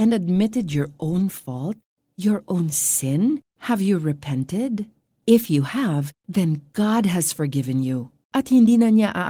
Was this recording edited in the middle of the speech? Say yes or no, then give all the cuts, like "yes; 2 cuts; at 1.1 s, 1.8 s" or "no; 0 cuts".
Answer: no; 0 cuts